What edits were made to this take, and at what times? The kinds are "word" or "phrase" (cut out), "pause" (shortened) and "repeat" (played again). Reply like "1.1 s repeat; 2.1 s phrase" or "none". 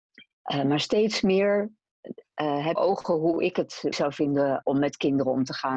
2.8 s phrase; 3.9 s word; 4.6 s word